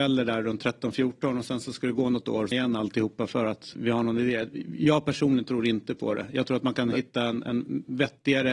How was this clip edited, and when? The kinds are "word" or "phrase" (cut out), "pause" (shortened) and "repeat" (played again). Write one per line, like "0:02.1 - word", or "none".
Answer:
0:02.5 - phrase
0:03.7 - word